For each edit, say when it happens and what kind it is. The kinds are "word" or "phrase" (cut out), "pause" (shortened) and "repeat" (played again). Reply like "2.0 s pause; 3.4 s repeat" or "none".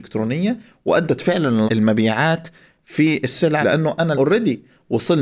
1.7 s word; 3.6 s word; 4.1 s word

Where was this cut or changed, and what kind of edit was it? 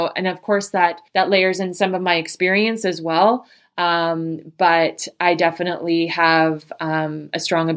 1.1 s pause

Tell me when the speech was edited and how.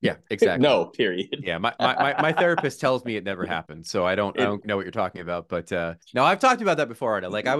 4.6 s word; 6.0 s pause

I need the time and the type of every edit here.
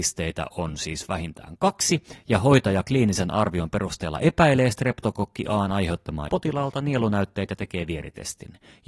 6.3 s phrase

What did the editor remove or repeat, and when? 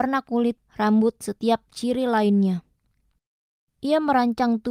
1.2 s word

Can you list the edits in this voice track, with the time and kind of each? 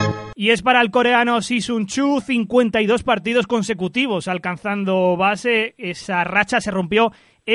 none

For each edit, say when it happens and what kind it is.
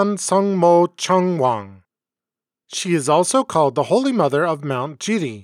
none

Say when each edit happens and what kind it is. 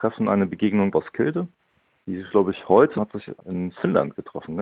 0.9 s word; 2.3 s word; 3.0 s phrase; 3.4 s phrase

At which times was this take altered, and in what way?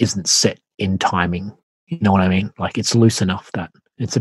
none

